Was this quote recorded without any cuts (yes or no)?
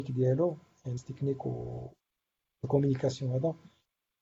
no